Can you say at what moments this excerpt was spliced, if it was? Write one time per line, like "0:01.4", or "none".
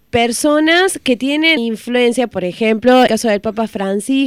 0:01.6
0:03.1